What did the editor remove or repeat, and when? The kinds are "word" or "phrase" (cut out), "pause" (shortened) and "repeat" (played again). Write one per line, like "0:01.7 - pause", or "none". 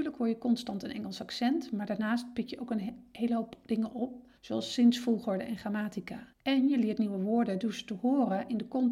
0:04.4 - pause
0:06.3 - pause